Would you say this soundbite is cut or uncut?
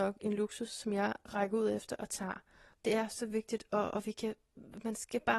uncut